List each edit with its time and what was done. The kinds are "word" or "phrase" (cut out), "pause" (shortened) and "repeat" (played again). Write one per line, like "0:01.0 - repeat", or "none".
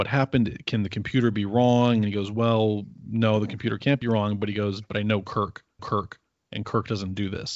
0:05.8 - repeat

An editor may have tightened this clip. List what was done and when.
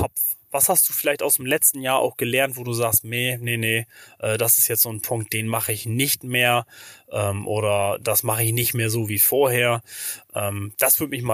none

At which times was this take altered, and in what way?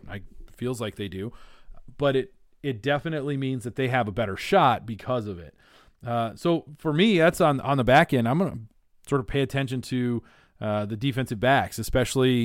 none

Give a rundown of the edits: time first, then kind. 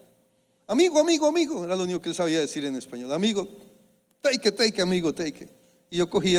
none

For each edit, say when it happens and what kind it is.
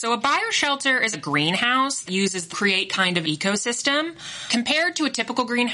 0:01.1 - word
0:02.1 - word
0:02.5 - phrase
0:03.2 - phrase

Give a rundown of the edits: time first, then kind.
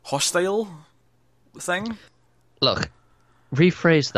none

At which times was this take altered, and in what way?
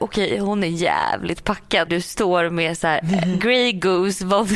0:01.9 - word

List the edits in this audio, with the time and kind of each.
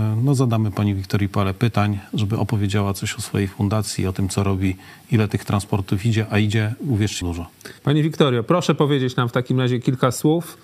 0:07.2 - phrase
0:07.8 - pause

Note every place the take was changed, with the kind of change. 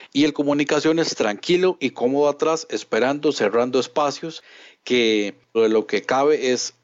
0:05.5 - word

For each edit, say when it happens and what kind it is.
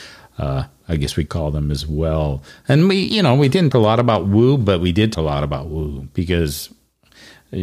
0:01.3 - word
0:03.7 - word
0:05.1 - word

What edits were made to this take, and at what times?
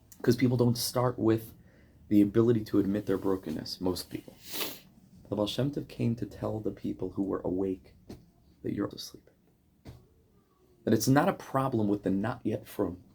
0:08.9 - word

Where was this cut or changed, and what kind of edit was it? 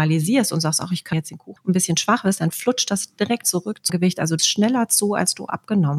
0:01.1 - word
0:01.6 - phrase
0:03.4 - word
0:03.9 - word
0:04.4 - word

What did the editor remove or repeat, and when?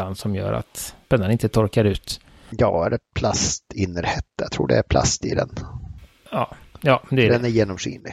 0:01.0 - pause
0:03.1 - word

